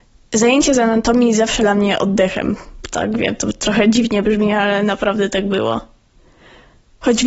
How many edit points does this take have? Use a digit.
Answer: 1